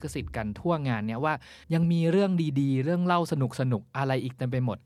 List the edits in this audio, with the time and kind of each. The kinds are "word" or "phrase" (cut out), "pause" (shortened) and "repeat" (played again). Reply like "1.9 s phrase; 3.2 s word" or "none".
1.6 s pause